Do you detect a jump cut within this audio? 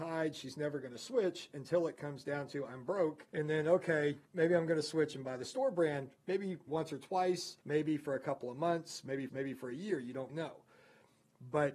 yes; 6 cuts; at 3.3 s, 4.3 s, 6.7 s, 7.6 s, 9.3 s, 10.3 s

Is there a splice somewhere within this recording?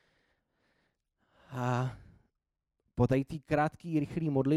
no; 0 cuts

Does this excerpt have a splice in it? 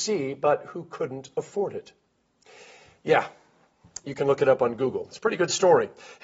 no; 0 cuts

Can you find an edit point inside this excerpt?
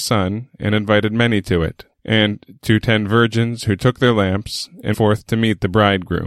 yes; 2 cuts; at 1.9 s, 4.9 s

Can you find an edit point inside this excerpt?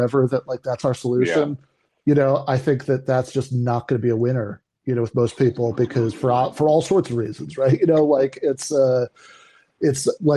no; 0 cuts

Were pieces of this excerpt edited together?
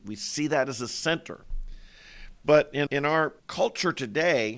yes; 2 cuts; at 2.9 s, 3.4 s

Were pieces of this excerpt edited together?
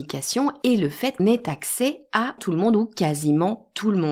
yes; 2 cuts; at 1.2 s, 2.4 s

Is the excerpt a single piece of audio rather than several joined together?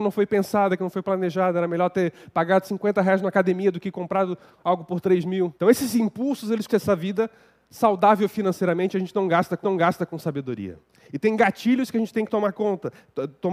no; 3 cuts; at 5.6 s, 6.7 s, 9.6 s

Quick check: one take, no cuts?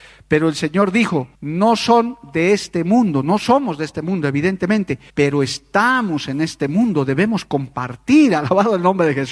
no; 2 cuts; at 1.3 s, 5.1 s

